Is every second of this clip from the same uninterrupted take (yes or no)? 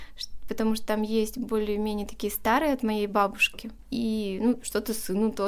yes